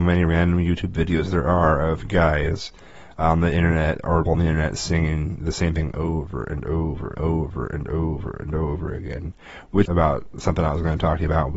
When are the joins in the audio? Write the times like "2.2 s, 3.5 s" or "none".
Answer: 4.3 s, 7.2 s, 9.9 s